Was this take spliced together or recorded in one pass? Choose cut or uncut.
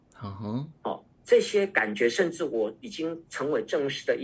cut